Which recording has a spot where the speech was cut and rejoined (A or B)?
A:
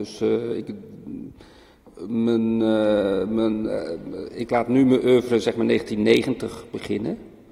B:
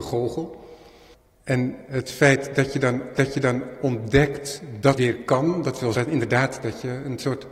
B